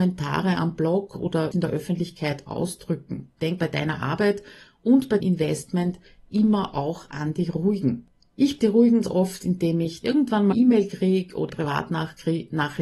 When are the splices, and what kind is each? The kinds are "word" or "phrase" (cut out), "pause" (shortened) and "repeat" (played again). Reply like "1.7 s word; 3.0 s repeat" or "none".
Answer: 1.5 s word; 3.6 s word; 5.2 s word; 8.6 s word; 9.0 s word; 10.0 s word; 10.5 s word; 11.5 s word